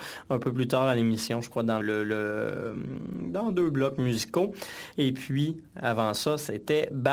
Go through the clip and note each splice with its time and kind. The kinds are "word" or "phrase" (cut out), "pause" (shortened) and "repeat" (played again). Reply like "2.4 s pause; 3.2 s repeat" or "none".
1.8 s word